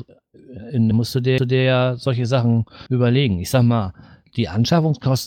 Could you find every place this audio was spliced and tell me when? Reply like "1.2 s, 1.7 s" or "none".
0.9 s, 1.4 s, 2.9 s